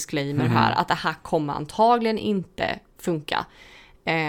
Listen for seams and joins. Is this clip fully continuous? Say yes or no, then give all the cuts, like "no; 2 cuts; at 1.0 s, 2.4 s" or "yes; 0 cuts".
yes; 0 cuts